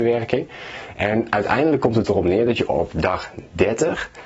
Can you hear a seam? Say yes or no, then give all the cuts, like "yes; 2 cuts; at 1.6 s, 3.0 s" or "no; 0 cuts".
no; 0 cuts